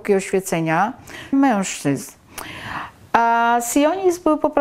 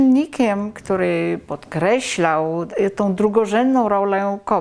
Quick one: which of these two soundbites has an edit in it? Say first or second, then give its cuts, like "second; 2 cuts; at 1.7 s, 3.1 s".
first; 1 cut; at 1.3 s